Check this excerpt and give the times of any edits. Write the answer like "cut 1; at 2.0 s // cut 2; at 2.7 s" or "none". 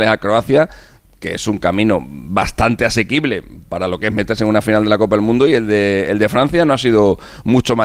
none